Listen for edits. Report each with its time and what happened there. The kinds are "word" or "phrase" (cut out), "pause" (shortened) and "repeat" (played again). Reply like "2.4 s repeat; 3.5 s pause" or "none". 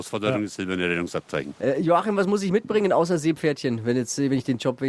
none